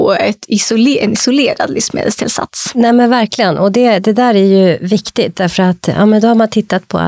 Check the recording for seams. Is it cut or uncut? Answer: uncut